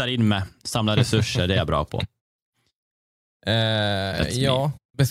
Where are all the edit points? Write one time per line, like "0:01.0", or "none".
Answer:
none